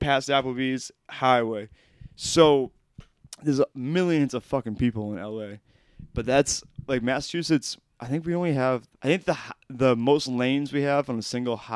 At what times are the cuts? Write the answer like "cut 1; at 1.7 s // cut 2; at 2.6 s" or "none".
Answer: cut 1; at 3.7 s // cut 2; at 8.9 s